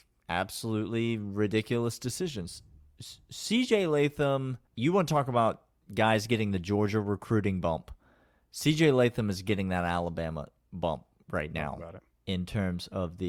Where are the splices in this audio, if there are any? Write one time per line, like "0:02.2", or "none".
0:04.7